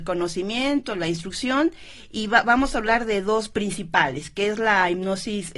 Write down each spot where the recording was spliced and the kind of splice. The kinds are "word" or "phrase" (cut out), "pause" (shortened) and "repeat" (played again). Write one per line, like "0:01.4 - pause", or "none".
none